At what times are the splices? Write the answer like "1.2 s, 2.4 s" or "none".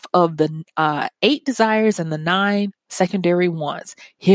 none